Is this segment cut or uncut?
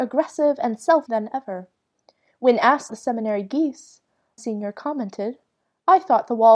cut